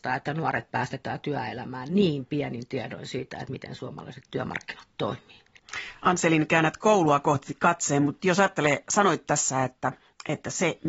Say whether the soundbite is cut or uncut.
uncut